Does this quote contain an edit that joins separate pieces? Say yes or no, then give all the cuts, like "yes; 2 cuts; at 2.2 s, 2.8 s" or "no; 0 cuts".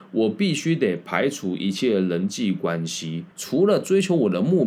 yes; 1 cut; at 3.3 s